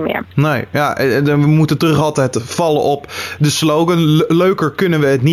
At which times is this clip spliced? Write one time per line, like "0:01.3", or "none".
none